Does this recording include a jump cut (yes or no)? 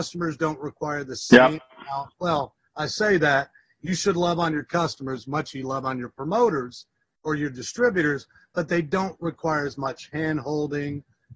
no